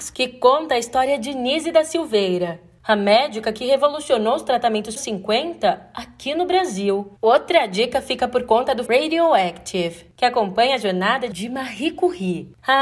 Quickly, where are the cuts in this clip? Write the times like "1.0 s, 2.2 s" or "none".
5.0 s, 7.2 s, 8.9 s